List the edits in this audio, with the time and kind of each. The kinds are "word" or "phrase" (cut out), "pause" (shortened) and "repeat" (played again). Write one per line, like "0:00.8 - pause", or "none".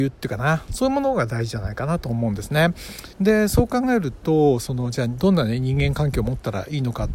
0:03.1 - pause